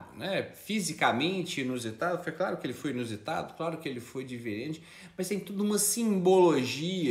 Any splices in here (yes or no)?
no